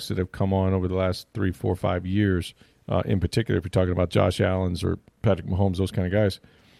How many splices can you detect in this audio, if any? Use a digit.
1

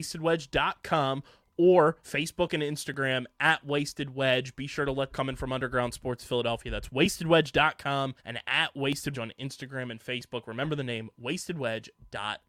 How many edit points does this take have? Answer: 4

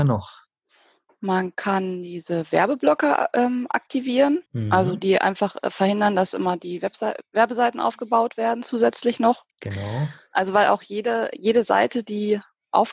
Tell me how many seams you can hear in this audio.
2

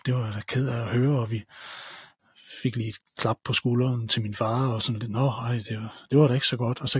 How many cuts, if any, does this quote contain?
0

